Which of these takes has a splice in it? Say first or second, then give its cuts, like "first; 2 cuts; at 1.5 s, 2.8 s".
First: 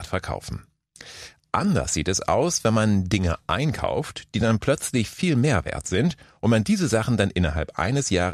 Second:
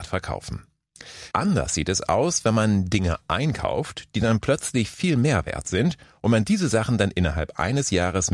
second; 1 cut; at 1.3 s